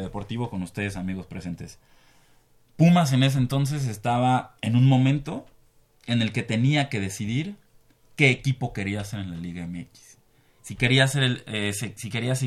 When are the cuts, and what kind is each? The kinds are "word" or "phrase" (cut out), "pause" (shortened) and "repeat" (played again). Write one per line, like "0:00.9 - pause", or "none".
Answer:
none